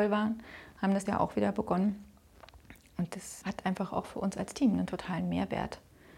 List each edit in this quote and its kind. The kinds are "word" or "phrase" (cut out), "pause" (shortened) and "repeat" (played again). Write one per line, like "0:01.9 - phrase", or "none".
0:01.1 - word
0:03.4 - word